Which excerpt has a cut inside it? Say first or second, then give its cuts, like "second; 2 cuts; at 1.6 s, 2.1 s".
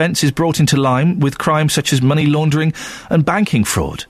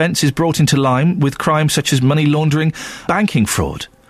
second; 1 cut; at 3.1 s